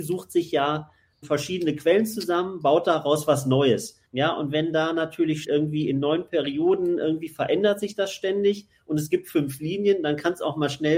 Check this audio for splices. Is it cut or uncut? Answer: cut